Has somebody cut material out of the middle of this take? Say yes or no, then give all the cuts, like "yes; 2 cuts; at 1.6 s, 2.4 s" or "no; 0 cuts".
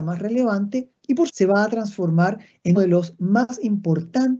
yes; 2 cuts; at 1.3 s, 2.8 s